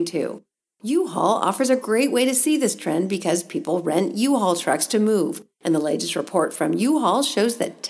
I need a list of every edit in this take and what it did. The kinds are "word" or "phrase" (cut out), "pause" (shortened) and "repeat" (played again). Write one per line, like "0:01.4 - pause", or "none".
0:05.5 - pause